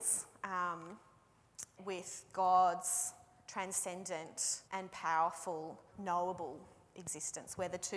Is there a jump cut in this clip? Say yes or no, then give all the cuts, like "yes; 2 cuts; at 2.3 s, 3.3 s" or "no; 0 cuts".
yes; 3 cuts; at 1.8 s, 4.7 s, 5.9 s